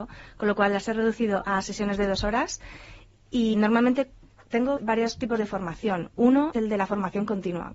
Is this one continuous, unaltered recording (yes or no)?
no